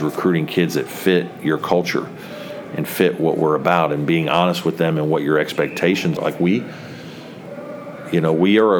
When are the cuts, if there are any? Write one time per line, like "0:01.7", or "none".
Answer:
0:06.2